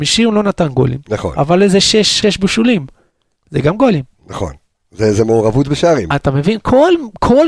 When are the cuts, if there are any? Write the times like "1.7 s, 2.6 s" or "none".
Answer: 2.2 s